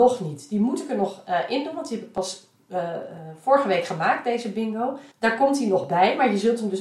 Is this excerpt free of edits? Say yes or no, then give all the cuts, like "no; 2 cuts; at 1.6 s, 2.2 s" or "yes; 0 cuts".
no; 1 cut; at 5.1 s